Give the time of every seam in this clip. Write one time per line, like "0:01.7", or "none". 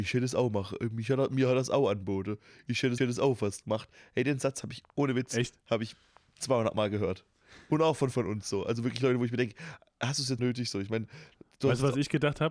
0:03.0
0:08.1
0:10.4